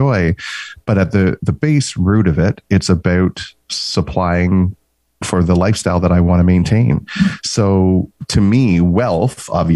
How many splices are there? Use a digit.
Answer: 0